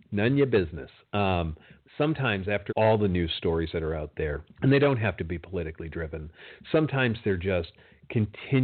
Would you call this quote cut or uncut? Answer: cut